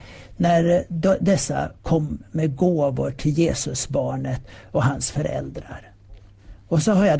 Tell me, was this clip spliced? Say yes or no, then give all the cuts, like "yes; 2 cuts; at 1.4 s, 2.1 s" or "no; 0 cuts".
no; 0 cuts